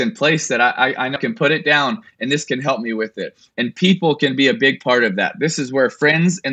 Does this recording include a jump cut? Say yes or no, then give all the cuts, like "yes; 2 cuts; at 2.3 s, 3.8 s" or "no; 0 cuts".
yes; 1 cut; at 1.2 s